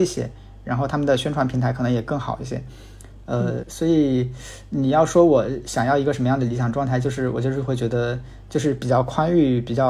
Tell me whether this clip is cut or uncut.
cut